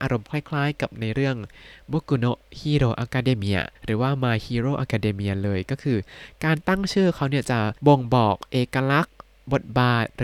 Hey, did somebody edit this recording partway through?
yes; 2 cuts; at 3.8 s, 7.8 s

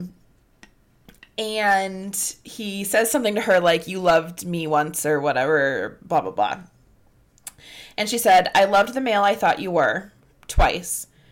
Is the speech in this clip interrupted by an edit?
no; 0 cuts

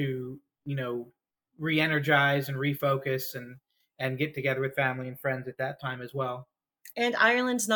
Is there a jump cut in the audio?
no; 0 cuts

